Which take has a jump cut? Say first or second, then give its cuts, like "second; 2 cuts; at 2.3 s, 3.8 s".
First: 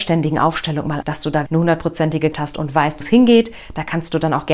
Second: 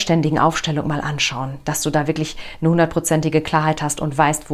first; 4 cuts; at 1.0 s, 1.5 s, 2.3 s, 3.0 s